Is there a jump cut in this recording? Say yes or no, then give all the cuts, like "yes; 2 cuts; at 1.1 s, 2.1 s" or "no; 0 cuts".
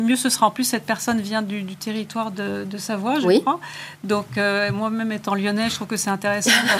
no; 0 cuts